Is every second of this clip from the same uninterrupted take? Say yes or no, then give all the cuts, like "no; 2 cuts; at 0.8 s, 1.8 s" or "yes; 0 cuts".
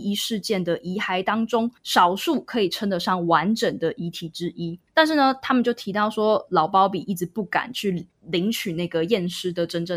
no; 3 cuts; at 1.8 s, 4.9 s, 8.1 s